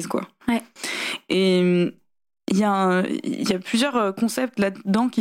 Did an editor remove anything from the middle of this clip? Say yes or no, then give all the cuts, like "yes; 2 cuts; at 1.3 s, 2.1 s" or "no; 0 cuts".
no; 0 cuts